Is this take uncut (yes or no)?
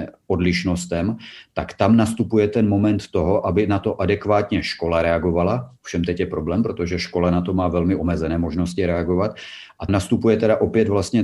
no